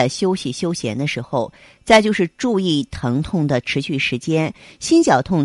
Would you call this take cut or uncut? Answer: uncut